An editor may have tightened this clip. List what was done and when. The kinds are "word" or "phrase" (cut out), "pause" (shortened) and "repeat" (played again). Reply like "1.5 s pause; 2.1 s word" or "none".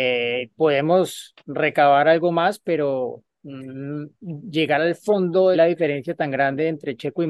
1.4 s pause; 5.5 s phrase